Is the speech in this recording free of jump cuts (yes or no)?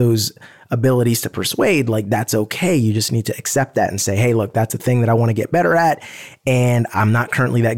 yes